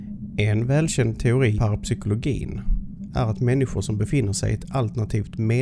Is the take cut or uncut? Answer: cut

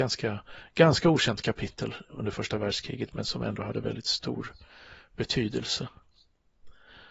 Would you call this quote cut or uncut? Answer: uncut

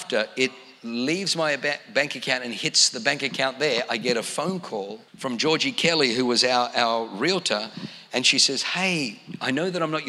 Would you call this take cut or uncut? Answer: cut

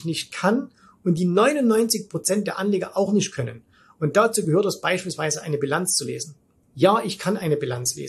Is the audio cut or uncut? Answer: uncut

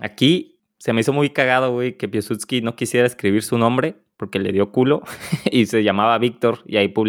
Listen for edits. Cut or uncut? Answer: uncut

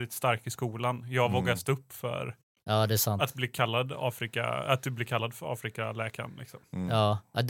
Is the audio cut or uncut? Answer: uncut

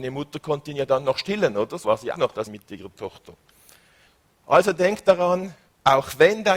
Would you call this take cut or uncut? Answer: cut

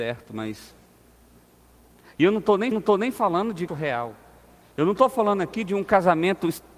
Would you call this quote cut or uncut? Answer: cut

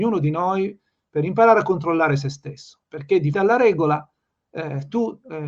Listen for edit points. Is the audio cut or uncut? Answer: cut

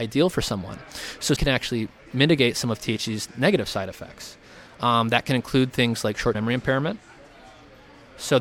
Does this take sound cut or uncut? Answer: cut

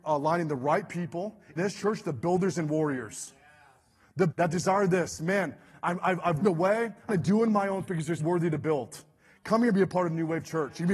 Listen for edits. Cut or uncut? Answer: cut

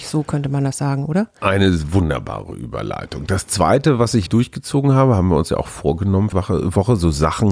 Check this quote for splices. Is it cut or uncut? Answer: cut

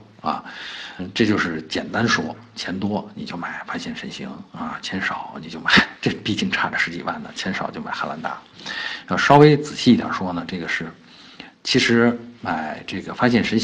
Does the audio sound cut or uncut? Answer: cut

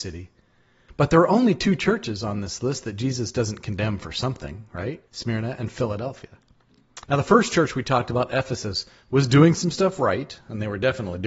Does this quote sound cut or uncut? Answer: cut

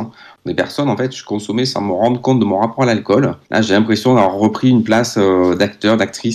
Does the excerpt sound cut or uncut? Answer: cut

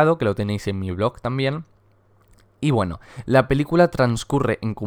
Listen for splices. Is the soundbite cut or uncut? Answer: uncut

